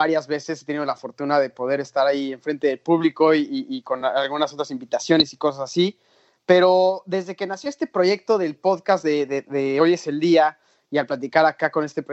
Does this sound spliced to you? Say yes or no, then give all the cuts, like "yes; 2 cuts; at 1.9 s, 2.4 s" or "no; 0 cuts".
no; 0 cuts